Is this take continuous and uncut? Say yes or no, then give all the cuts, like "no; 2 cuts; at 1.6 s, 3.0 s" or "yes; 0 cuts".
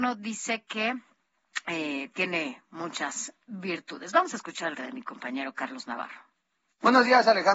no; 1 cut; at 4.7 s